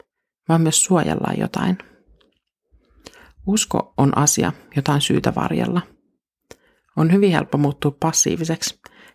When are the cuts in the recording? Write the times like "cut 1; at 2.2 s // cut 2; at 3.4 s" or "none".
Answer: none